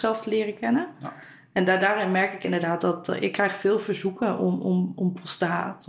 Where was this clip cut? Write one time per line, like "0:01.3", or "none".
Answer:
none

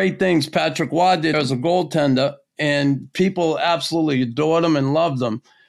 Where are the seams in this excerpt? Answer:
0:01.3

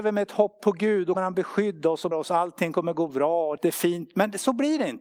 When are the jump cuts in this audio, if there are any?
0:01.1
0:02.1
0:03.6

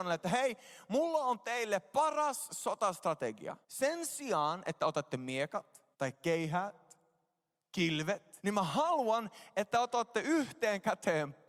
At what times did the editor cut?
0:03.6
0:05.9
0:08.4

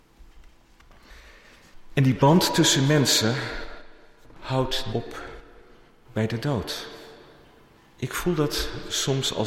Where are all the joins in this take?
0:04.9

